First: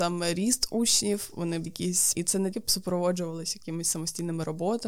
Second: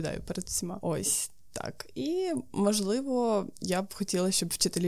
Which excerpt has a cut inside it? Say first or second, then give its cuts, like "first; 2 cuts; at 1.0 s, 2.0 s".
first; 3 cuts; at 1.7 s, 2.1 s, 2.5 s